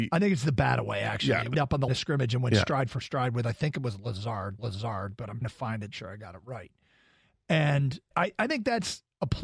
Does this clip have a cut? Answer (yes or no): yes